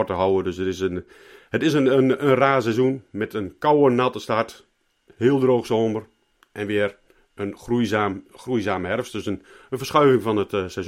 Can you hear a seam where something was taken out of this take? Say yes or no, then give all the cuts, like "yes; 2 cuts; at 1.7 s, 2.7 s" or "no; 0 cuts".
no; 0 cuts